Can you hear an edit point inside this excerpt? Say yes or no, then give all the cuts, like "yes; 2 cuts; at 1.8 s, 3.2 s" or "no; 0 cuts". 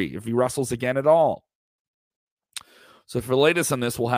no; 0 cuts